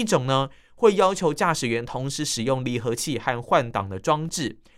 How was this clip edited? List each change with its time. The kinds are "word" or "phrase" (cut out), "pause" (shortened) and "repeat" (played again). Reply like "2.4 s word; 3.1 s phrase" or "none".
none